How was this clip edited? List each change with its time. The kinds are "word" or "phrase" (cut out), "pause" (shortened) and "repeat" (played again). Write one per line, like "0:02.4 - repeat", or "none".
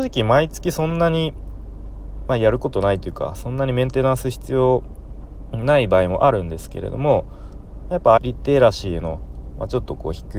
0:08.2 - word